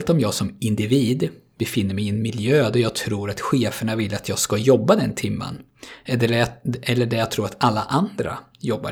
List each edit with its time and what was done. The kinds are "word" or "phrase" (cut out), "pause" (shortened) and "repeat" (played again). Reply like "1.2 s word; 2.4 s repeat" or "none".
none